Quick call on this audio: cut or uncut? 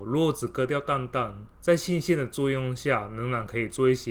cut